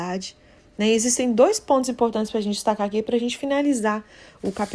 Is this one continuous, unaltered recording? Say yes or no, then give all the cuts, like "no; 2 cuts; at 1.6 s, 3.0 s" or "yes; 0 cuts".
yes; 0 cuts